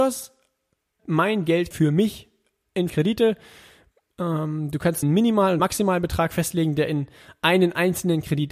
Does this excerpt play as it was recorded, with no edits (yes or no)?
no